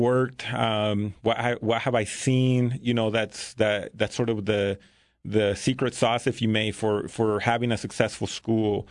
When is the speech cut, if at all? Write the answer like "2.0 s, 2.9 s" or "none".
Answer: none